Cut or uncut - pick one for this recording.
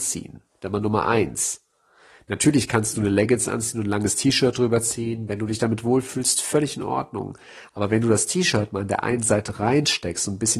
uncut